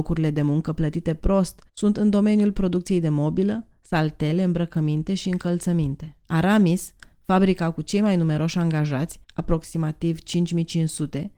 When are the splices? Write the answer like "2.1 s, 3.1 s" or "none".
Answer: 1.7 s, 6.2 s, 9.2 s